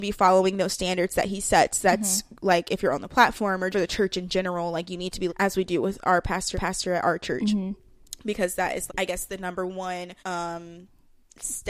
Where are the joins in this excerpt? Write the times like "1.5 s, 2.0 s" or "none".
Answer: 3.7 s, 5.3 s, 6.5 s, 8.9 s, 10.2 s